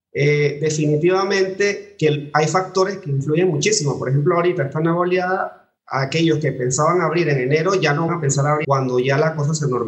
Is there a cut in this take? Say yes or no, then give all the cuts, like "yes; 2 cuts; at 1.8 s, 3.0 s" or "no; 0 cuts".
yes; 3 cuts; at 5.8 s, 8.1 s, 8.6 s